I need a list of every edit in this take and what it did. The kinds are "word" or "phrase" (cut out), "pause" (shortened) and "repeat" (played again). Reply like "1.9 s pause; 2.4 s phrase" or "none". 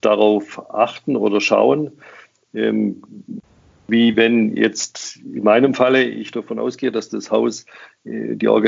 none